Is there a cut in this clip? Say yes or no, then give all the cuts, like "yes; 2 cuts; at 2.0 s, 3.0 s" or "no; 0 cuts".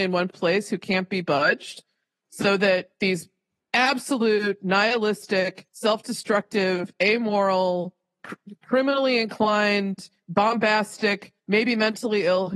yes; 4 cuts; at 2.9 s, 5.7 s, 8.2 s, 11.4 s